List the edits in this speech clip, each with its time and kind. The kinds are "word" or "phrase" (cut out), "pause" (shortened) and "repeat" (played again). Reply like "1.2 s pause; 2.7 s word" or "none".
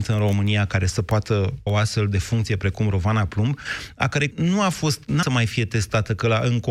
1.7 s word; 4.3 s word; 5.2 s word